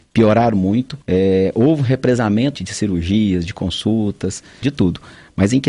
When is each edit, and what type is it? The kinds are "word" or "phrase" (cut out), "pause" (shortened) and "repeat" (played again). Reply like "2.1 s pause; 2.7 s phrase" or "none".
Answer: 1.0 s pause; 2.5 s word; 4.6 s word